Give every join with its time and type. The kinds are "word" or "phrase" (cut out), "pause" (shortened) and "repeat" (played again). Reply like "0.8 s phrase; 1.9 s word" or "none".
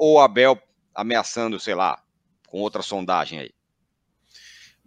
none